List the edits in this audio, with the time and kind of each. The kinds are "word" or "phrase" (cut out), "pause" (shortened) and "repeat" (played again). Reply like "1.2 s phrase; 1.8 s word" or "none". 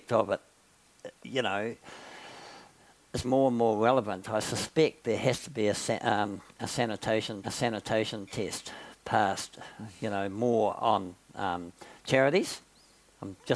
1.2 s pause; 3.2 s word; 7.4 s repeat